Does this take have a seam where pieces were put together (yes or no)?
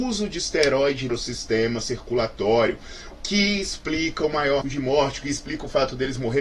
yes